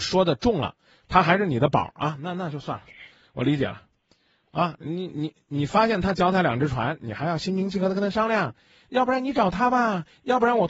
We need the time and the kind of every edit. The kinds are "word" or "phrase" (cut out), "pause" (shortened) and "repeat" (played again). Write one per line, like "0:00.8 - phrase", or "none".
none